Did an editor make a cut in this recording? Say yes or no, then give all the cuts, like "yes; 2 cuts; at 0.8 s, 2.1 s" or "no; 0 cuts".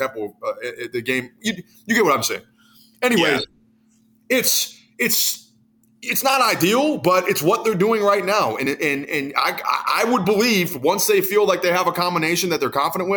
no; 0 cuts